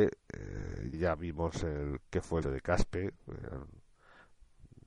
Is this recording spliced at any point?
yes; 3 cuts; at 0.9 s, 2.0 s, 2.4 s

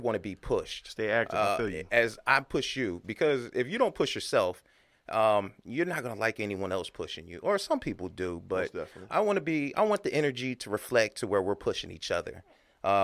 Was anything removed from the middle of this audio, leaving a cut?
no; 0 cuts

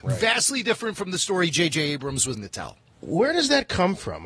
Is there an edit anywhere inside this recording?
yes; 1 cut; at 2.3 s

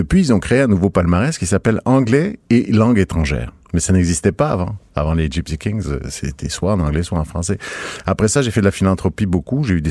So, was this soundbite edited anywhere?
no; 0 cuts

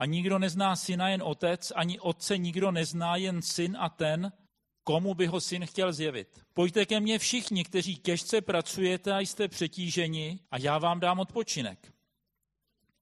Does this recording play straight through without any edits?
no; 3 cuts; at 4.5 s, 6.5 s, 10.4 s

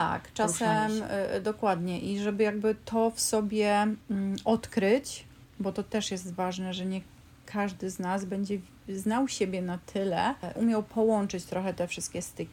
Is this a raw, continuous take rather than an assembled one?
no; 1 cut; at 10.5 s

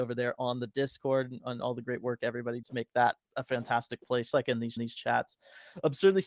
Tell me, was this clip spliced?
yes; 4 cuts; at 2.6 s, 3.3 s, 4.3 s, 4.8 s

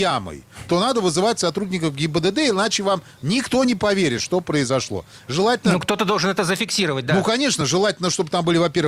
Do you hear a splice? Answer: no; 0 cuts

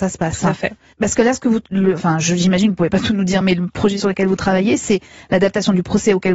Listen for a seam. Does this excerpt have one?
no; 0 cuts

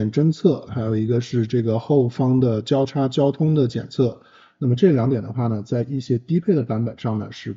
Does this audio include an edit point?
no; 0 cuts

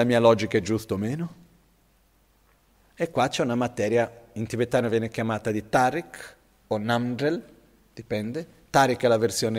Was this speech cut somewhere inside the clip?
no; 0 cuts

